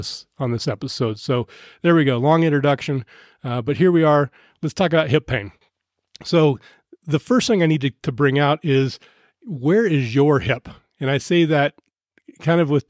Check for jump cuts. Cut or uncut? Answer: uncut